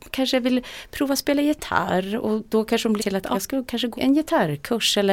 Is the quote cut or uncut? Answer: cut